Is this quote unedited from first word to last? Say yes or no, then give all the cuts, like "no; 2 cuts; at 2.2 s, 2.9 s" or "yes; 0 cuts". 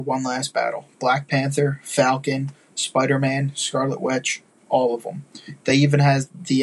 yes; 0 cuts